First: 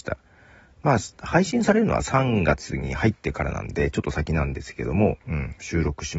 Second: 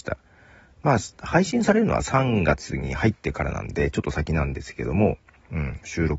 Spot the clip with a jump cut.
first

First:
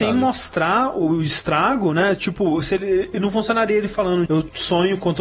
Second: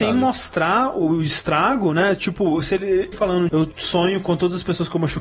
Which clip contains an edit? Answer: second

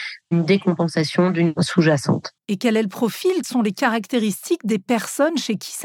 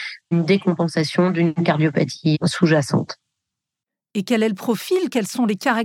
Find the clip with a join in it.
first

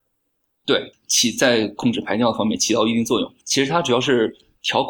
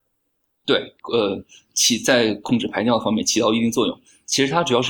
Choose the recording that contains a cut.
first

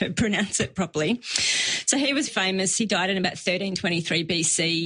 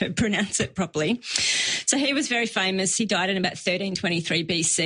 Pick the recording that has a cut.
first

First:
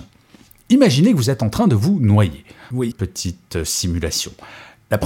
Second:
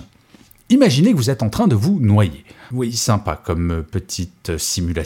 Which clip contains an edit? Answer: first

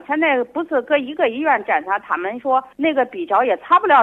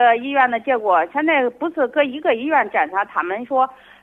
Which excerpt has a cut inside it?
first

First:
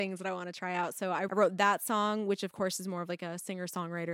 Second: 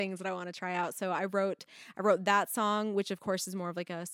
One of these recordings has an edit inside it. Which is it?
first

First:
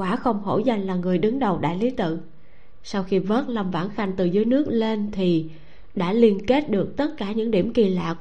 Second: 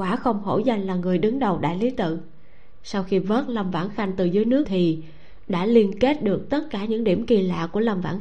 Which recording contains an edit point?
second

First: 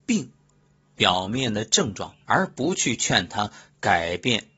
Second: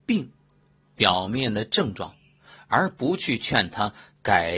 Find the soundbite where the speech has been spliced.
first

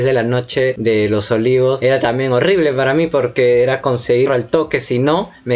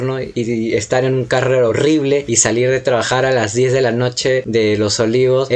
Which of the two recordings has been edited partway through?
first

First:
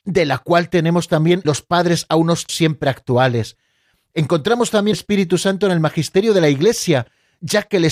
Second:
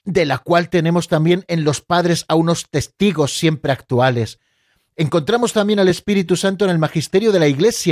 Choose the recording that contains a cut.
first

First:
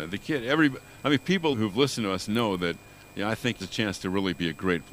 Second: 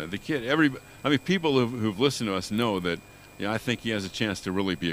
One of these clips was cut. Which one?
first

